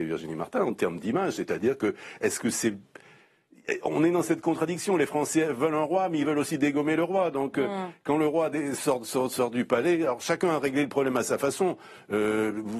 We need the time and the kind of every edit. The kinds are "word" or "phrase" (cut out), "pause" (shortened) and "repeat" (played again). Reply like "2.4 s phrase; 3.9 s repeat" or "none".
none